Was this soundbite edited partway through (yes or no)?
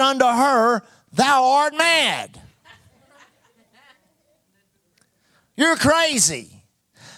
no